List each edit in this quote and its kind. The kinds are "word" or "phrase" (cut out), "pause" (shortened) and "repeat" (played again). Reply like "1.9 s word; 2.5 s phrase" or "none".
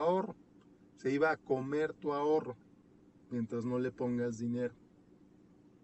none